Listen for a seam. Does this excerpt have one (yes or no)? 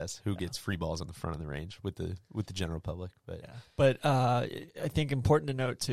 yes